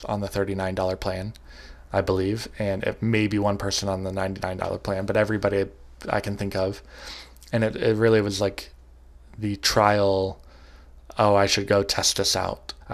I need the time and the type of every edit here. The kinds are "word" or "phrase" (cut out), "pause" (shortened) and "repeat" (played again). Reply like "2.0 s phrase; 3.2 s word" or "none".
none